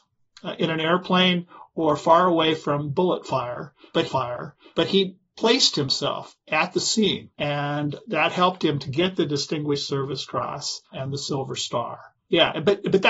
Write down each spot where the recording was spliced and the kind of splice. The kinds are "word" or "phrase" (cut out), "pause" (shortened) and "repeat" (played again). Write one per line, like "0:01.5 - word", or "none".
0:04.1 - repeat
0:07.3 - pause
0:10.8 - pause